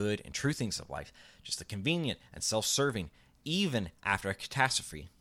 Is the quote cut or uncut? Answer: uncut